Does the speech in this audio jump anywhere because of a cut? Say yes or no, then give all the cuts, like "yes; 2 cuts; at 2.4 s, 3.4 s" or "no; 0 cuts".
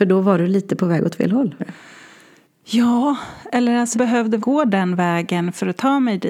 yes; 3 cuts; at 1.6 s, 3.9 s, 4.4 s